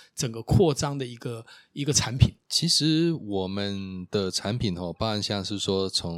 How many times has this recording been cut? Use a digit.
1